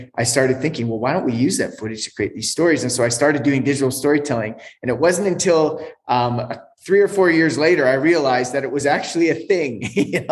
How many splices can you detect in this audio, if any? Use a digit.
0